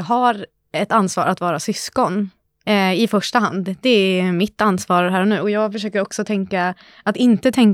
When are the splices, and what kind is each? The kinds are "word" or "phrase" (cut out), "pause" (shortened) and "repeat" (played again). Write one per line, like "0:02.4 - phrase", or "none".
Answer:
none